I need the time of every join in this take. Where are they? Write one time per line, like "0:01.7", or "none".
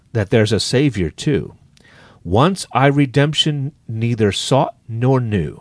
none